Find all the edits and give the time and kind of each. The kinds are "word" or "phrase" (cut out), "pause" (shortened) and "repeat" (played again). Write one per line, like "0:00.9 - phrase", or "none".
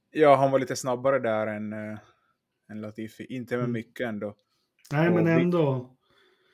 none